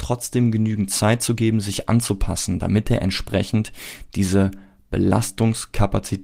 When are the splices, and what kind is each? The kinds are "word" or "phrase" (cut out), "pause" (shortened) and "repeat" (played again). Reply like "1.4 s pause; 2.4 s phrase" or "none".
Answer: none

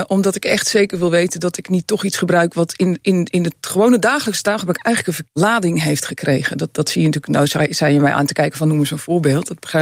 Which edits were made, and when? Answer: 5.3 s word

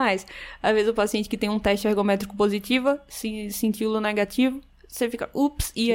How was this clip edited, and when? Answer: none

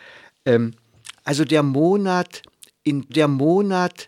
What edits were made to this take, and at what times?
3.1 s repeat

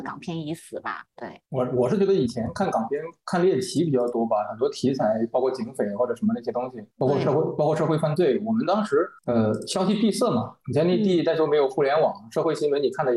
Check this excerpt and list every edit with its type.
6.9 s pause; 9.2 s pause

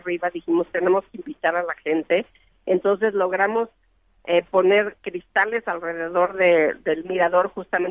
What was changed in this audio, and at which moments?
none

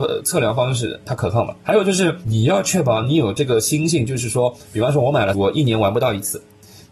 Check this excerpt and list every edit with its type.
5.3 s word

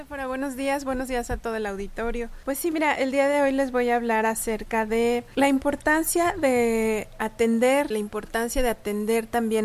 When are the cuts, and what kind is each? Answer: 7.9 s phrase

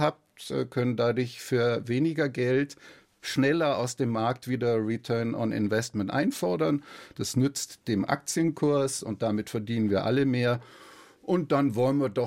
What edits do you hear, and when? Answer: none

